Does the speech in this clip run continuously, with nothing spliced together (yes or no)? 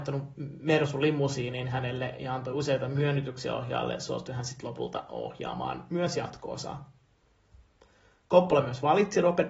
yes